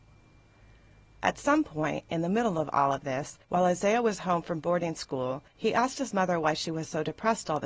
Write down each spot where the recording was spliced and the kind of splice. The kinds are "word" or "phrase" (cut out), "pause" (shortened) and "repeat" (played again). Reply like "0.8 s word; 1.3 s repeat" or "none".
3.4 s pause; 5.5 s pause